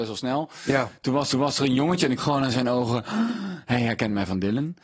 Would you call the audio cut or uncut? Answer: cut